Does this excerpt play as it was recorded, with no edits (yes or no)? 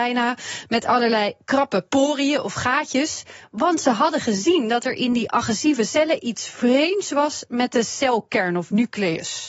yes